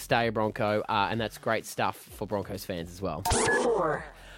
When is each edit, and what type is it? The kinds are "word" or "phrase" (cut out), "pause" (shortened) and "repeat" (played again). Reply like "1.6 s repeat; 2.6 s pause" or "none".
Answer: none